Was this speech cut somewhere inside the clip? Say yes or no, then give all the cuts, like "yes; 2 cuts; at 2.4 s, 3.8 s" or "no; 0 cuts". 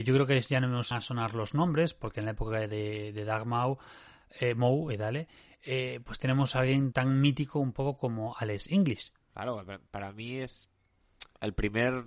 yes; 2 cuts; at 0.9 s, 6.9 s